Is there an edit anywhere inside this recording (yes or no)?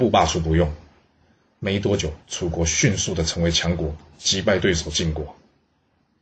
yes